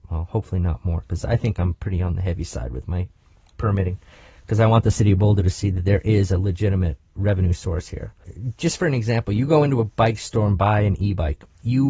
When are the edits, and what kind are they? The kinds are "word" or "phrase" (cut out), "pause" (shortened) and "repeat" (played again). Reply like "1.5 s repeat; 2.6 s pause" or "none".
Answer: none